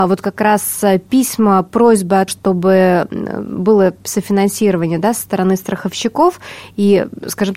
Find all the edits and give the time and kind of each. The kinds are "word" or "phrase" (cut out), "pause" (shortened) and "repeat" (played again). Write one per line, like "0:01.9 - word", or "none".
0:02.3 - word